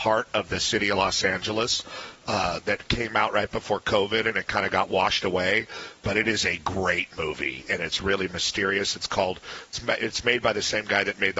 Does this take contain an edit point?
no; 0 cuts

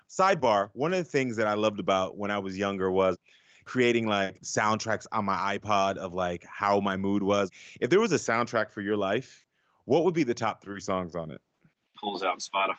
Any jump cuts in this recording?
no; 0 cuts

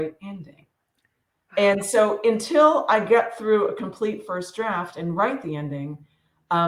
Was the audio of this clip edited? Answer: no; 0 cuts

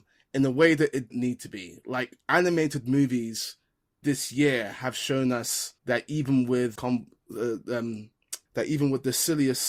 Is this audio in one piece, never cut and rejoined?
no; 5 cuts; at 1.1 s, 4.0 s, 5.8 s, 6.8 s, 8.5 s

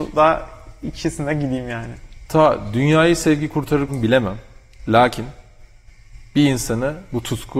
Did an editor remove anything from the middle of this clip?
yes; 1 cut; at 3.9 s

